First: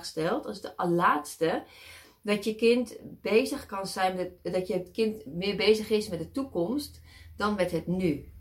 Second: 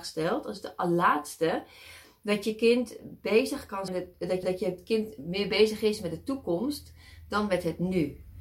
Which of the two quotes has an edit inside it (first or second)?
second